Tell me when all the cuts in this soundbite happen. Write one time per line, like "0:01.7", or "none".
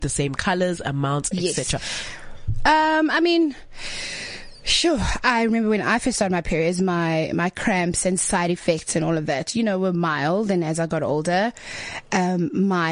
0:01.3